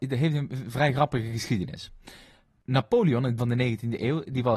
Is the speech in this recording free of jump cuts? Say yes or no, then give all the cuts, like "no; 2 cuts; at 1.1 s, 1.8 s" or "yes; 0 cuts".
no; 1 cut; at 3.4 s